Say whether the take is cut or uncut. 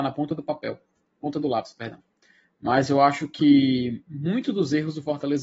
uncut